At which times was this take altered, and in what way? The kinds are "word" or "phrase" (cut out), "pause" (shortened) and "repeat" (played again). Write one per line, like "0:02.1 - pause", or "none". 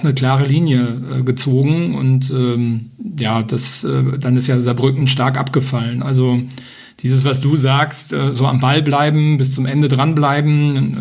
0:05.0 - word